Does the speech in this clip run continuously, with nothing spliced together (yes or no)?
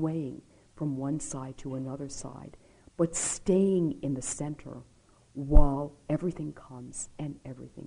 yes